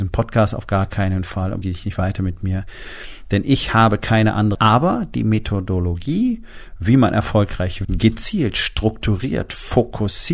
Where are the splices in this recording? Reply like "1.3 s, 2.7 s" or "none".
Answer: 1.6 s, 4.5 s, 7.8 s